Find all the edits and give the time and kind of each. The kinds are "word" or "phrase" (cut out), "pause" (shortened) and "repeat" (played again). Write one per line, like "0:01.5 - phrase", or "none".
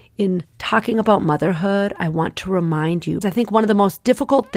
0:03.2 - word